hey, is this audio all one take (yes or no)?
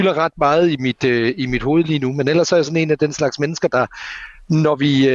yes